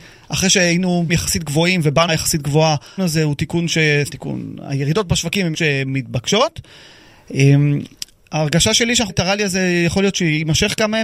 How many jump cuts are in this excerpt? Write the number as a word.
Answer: six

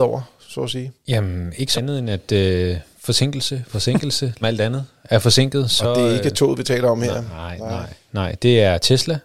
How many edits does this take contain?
three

